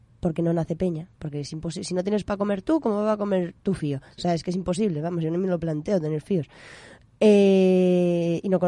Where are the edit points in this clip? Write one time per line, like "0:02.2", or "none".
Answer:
none

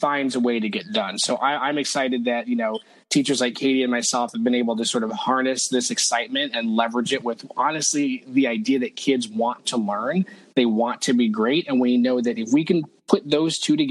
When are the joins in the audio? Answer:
none

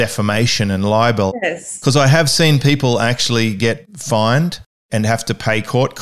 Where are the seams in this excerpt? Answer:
none

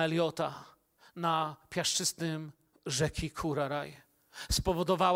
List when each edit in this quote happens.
0:02.7

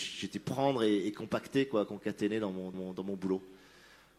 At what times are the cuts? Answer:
0:02.7

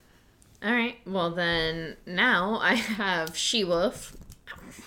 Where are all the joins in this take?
none

